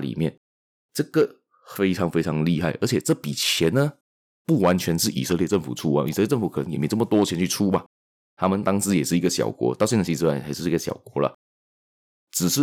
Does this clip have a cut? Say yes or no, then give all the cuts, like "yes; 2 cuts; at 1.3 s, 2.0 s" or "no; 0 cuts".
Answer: no; 0 cuts